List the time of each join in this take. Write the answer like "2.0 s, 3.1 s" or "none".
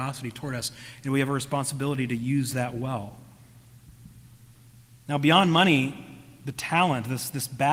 none